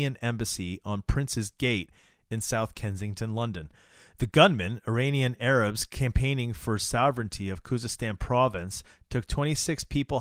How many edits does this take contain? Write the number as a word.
zero